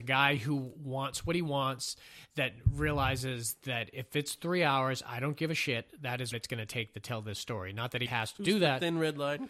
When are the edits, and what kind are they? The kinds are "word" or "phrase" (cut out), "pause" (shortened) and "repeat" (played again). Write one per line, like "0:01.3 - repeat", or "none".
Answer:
0:06.3 - word
0:08.1 - word